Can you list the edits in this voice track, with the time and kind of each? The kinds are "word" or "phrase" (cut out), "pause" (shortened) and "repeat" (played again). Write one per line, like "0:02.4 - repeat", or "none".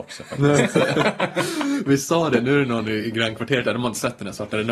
none